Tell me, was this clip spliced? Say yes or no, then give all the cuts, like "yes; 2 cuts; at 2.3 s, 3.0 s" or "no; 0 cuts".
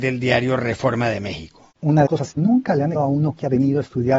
yes; 4 cuts; at 1.7 s, 2.1 s, 2.4 s, 2.9 s